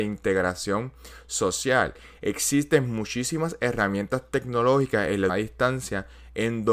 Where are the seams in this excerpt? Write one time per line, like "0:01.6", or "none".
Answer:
0:05.3